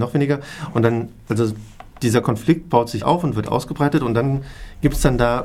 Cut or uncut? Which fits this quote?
cut